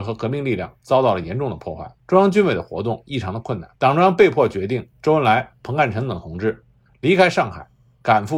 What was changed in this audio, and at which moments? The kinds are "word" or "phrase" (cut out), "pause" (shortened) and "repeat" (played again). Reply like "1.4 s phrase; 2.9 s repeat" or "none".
2.0 s pause; 3.8 s pause